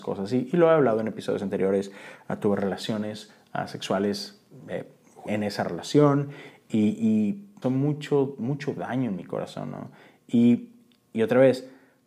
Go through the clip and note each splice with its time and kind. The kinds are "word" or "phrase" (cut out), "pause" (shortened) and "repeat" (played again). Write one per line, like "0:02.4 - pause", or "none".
0:05.3 - word
0:07.6 - phrase